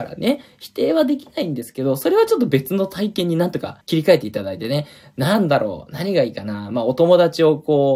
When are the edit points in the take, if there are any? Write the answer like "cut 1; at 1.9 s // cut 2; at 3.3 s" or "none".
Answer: cut 1; at 3.8 s